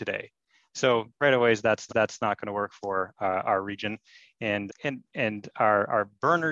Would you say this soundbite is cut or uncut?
cut